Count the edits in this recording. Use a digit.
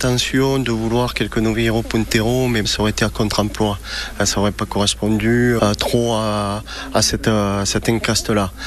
2